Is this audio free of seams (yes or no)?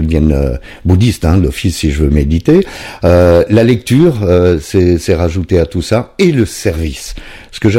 yes